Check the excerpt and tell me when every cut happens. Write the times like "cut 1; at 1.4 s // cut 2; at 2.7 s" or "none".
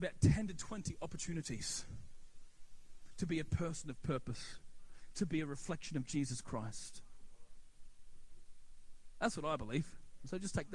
none